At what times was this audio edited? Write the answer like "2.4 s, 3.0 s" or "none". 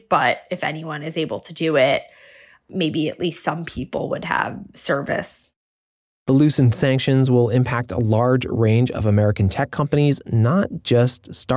none